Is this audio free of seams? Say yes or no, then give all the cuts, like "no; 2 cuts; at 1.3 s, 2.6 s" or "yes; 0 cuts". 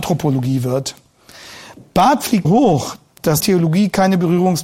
no; 2 cuts; at 2.4 s, 3.4 s